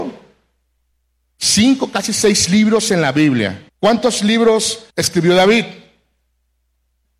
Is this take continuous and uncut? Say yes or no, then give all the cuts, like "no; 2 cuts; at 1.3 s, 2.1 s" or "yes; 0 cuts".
no; 2 cuts; at 3.7 s, 4.9 s